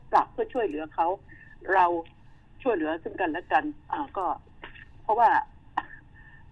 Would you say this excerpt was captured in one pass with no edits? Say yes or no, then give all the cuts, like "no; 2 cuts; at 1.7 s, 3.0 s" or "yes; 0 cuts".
no; 1 cut; at 3.8 s